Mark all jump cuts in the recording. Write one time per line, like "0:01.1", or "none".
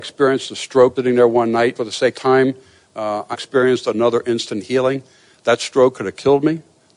0:01.0
0:01.8
0:02.1
0:03.3